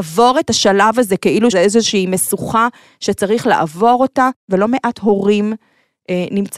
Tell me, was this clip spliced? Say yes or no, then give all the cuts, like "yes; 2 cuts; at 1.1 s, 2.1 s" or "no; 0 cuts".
yes; 1 cut; at 1.5 s